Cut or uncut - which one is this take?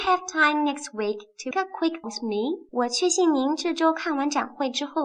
cut